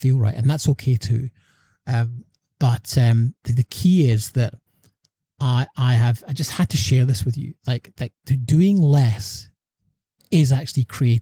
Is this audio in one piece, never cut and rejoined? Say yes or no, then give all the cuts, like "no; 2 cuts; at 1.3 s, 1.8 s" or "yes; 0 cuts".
yes; 0 cuts